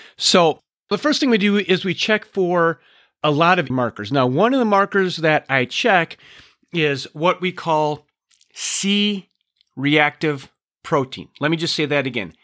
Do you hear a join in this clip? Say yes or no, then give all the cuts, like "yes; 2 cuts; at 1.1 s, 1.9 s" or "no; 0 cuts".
yes; 2 cuts; at 0.9 s, 3.7 s